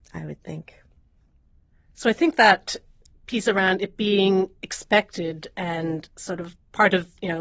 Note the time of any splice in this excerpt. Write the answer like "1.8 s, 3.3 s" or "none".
none

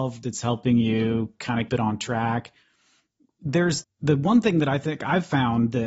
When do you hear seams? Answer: 1.7 s, 3.8 s

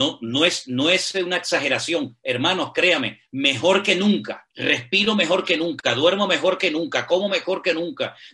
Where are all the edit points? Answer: 4.5 s

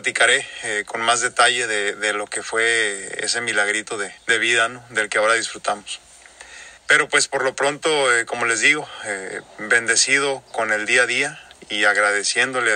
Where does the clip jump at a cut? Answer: 4.2 s, 6.8 s

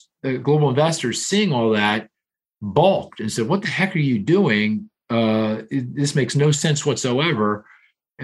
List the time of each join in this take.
none

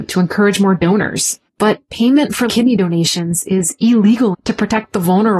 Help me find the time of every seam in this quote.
1.5 s, 2.5 s, 4.3 s

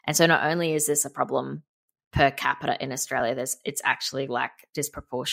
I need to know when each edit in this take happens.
none

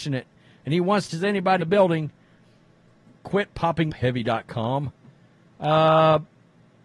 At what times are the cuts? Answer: 1.1 s, 1.6 s, 3.1 s, 3.9 s

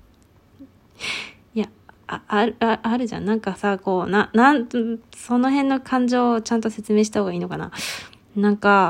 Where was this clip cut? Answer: none

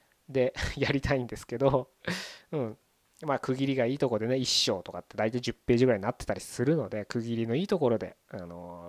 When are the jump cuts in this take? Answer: none

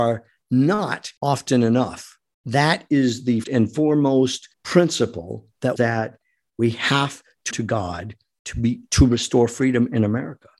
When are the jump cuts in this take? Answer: 1.2 s, 2.3 s, 3.4 s, 4.5 s, 5.8 s, 7.5 s

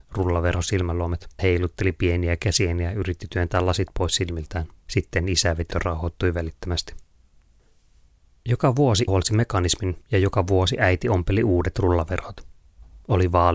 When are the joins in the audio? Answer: 1.4 s, 4.8 s, 5.7 s, 7.5 s, 9.1 s, 10.0 s

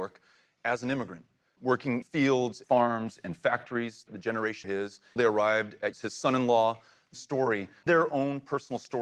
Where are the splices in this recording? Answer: 2.0 s, 2.6 s, 4.1 s, 4.6 s, 5.2 s, 5.9 s, 7.1 s, 7.9 s

